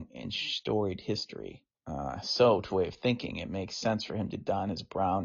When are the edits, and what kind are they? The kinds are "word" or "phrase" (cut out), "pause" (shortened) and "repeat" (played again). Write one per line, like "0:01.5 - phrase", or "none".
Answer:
0:01.7 - pause
0:02.7 - word